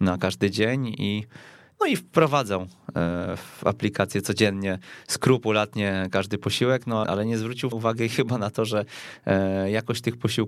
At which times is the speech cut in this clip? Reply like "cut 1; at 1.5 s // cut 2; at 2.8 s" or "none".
cut 1; at 7.0 s // cut 2; at 7.7 s